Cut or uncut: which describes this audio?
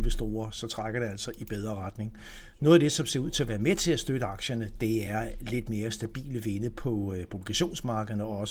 uncut